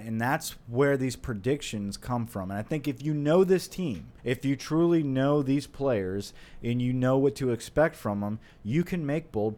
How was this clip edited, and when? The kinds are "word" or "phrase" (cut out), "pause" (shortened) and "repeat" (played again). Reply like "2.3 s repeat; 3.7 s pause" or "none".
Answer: 4.2 s pause